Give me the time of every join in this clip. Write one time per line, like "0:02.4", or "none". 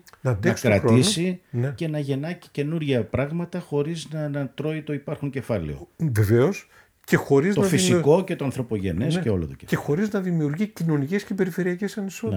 none